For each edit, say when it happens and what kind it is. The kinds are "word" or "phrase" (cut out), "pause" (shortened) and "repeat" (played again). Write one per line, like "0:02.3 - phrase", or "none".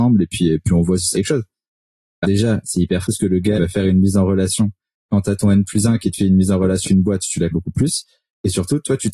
0:01.1 - word
0:02.2 - word
0:03.0 - word
0:03.6 - word
0:06.8 - word
0:07.5 - word